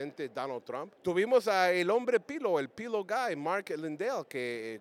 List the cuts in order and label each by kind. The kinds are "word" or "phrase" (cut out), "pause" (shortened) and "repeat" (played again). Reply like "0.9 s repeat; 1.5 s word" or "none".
1.0 s pause